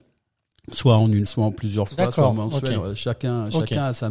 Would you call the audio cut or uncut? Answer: cut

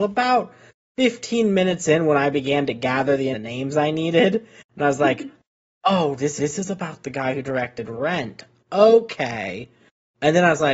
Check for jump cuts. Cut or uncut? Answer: cut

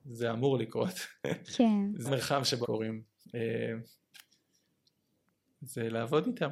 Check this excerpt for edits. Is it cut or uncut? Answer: cut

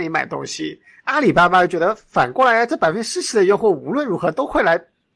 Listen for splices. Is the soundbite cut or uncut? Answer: uncut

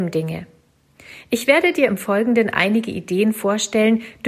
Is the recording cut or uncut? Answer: uncut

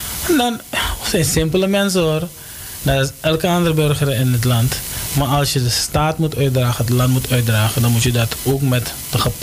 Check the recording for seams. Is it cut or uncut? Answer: uncut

